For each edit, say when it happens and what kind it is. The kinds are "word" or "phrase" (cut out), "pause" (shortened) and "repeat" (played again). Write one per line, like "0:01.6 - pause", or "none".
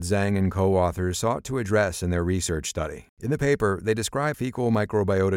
0:04.3 - word